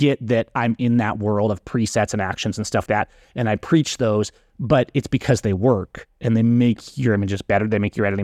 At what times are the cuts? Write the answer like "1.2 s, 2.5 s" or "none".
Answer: 2.9 s